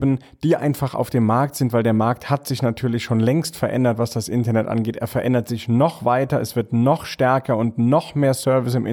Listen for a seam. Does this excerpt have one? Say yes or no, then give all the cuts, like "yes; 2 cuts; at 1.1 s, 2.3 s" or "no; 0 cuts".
no; 0 cuts